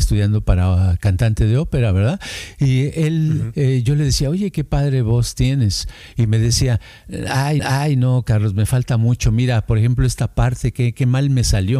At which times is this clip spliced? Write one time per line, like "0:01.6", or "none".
0:07.6